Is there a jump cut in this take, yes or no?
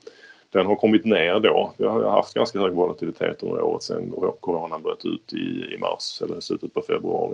no